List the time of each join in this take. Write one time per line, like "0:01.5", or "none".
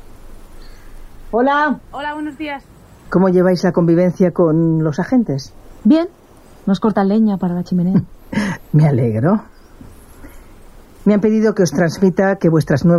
none

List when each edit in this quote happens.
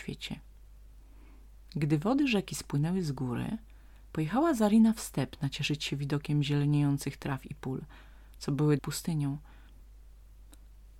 0:08.8

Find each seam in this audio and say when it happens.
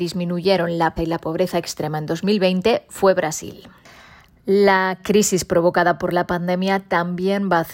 0:01.0

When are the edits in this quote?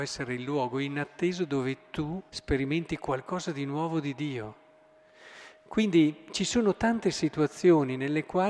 0:02.3

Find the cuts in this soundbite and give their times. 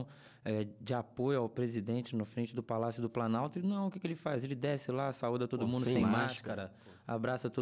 none

